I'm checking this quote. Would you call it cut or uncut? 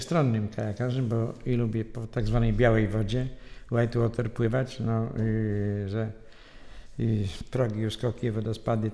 uncut